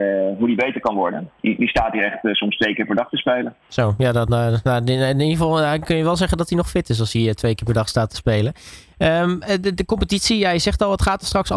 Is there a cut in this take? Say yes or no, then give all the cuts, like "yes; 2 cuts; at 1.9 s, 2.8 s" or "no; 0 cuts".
yes; 1 cut; at 3.6 s